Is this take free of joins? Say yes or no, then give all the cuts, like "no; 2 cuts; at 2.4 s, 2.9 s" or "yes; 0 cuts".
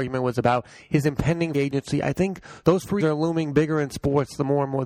no; 3 cuts; at 1.5 s, 2.6 s, 3.0 s